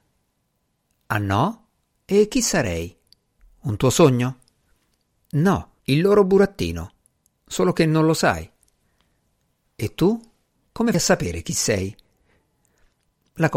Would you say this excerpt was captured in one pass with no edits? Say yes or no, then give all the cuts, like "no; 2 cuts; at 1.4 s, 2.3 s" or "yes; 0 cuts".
no; 2 cuts; at 5.8 s, 10.9 s